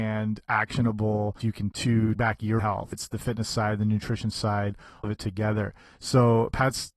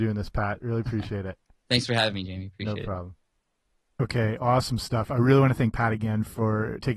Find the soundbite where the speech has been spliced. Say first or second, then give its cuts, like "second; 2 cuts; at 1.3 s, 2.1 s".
first; 6 cuts; at 1.4 s, 1.7 s, 2.2 s, 2.6 s, 2.9 s, 5.0 s